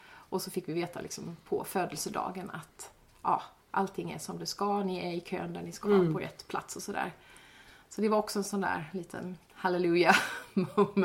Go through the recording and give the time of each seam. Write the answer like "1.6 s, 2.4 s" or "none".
none